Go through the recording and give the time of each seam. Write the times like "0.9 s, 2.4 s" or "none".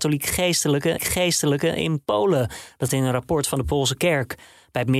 1.0 s, 2.9 s, 3.9 s